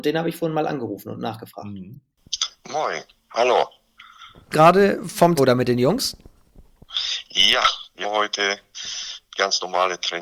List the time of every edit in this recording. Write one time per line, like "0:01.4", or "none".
0:03.2
0:04.5
0:05.4
0:08.0
0:09.2